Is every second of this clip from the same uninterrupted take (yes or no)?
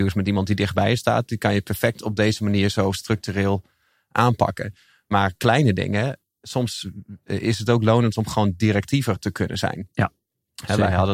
yes